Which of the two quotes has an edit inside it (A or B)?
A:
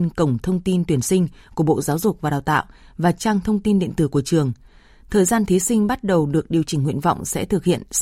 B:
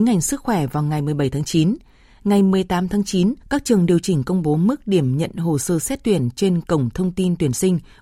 B